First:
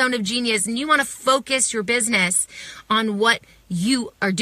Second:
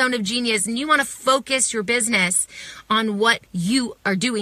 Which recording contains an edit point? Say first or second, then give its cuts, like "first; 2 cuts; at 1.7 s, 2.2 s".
second; 1 cut; at 3.5 s